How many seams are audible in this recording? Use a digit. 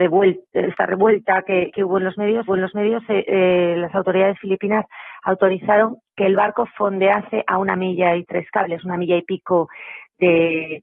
1